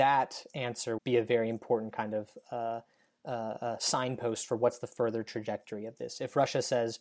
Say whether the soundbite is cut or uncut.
cut